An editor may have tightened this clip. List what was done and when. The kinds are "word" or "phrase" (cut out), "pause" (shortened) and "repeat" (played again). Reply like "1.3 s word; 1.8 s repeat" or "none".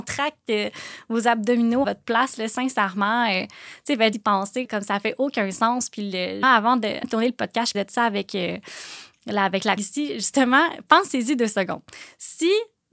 1.8 s word; 4.1 s word; 4.6 s word; 6.4 s word; 7.0 s word; 7.7 s word; 9.8 s word